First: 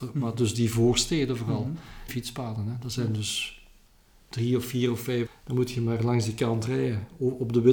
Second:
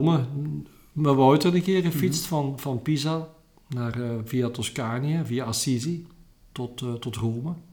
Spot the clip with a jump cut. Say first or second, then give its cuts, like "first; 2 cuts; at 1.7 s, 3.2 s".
first; 2 cuts; at 2.1 s, 5.3 s